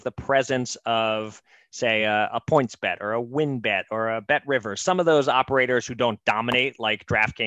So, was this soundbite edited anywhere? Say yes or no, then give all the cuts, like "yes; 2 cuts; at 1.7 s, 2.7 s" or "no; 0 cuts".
no; 0 cuts